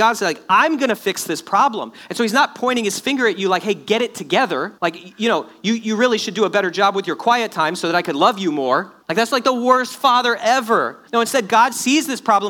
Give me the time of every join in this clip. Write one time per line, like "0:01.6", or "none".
0:04.8
0:09.0
0:11.1